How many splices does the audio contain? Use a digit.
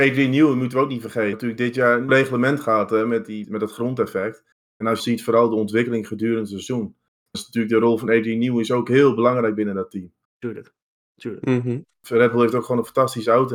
5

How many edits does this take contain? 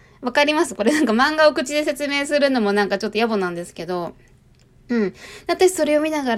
0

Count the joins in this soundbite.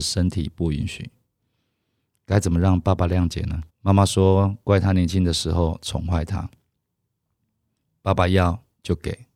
1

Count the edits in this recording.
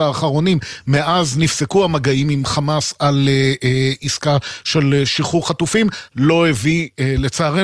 1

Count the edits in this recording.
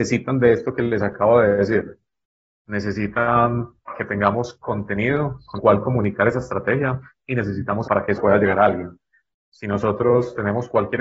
4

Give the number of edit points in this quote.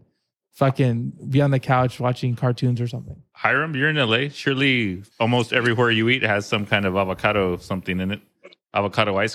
1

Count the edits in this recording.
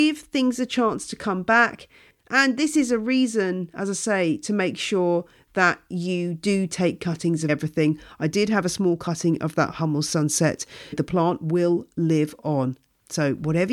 2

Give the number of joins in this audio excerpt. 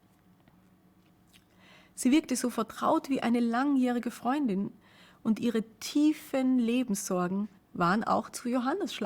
1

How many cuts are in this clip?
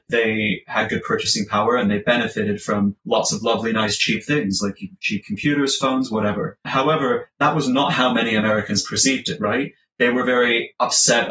0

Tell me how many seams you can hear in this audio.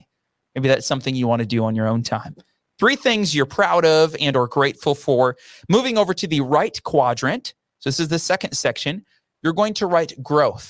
0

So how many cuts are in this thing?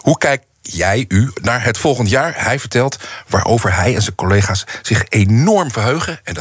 0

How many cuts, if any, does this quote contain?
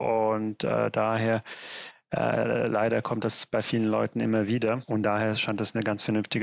0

